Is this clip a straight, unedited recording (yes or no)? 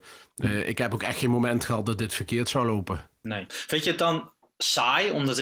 yes